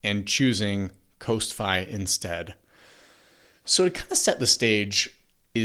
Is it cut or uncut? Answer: uncut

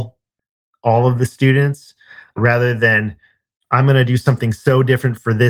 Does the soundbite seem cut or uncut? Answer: uncut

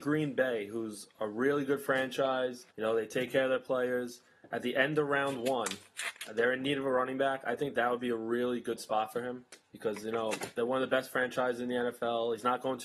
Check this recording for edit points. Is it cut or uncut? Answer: cut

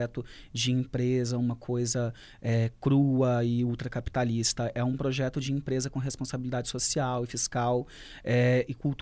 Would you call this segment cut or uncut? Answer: uncut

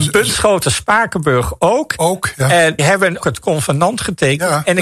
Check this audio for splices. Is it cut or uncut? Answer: cut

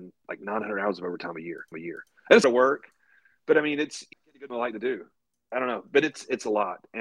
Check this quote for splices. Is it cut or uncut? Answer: cut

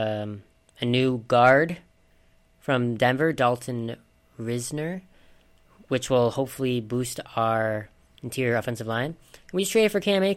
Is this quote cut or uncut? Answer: uncut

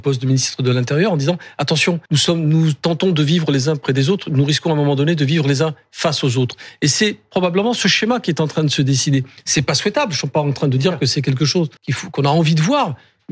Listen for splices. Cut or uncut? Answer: cut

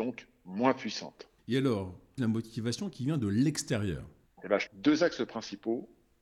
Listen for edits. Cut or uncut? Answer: cut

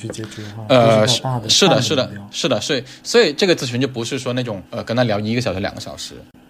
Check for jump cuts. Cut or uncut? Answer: cut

